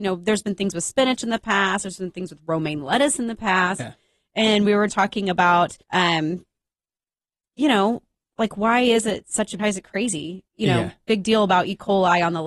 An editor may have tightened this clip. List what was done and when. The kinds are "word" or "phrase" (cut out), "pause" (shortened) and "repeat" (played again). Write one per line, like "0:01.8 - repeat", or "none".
0:04.9 - word
0:05.8 - pause
0:09.6 - phrase
0:10.5 - pause